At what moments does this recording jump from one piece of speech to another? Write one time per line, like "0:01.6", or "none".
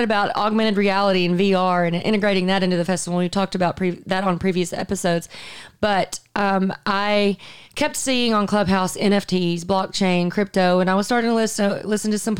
0:07.6

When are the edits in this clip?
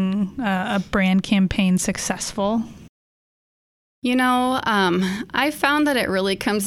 none

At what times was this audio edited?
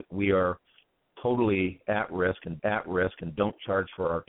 0:02.6

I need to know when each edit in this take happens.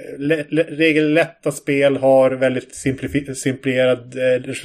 none

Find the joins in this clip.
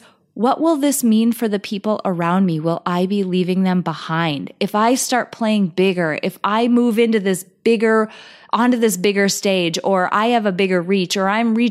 none

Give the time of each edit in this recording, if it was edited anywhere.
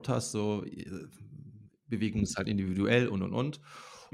none

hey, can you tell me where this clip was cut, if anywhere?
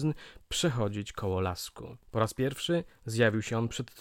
0:02.0

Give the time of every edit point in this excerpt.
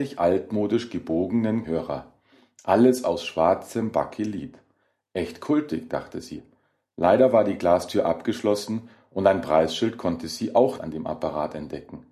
0:01.6
0:10.8

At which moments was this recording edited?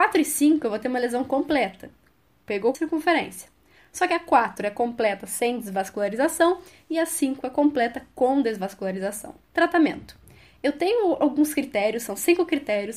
0:02.7
0:09.4

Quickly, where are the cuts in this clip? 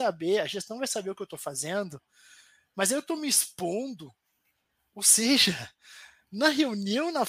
none

